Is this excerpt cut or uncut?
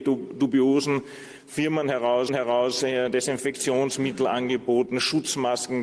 cut